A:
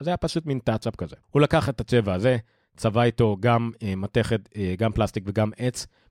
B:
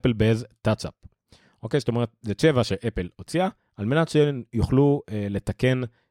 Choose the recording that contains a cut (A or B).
A